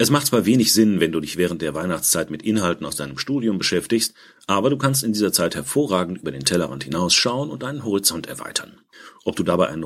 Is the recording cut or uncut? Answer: uncut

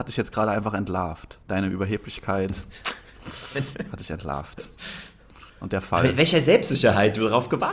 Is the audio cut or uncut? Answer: cut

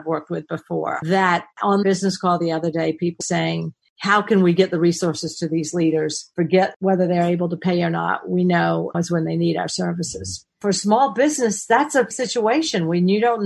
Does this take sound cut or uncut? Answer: cut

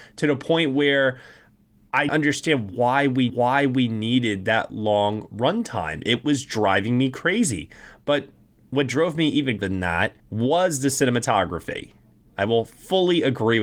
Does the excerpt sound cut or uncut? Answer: cut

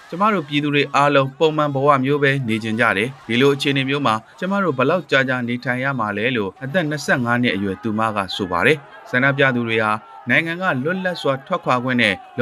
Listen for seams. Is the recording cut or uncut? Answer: cut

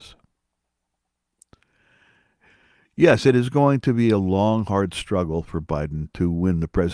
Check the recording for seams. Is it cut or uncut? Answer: uncut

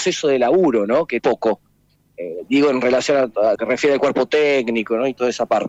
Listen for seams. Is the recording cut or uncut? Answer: cut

